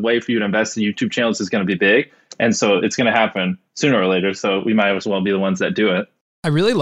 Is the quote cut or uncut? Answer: uncut